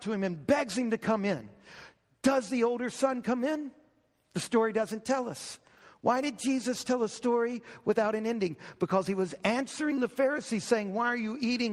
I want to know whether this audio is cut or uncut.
uncut